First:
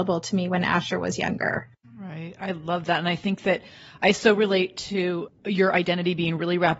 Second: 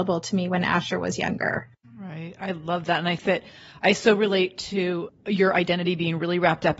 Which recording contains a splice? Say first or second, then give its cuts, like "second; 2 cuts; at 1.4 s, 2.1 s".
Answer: second; 1 cut; at 3.2 s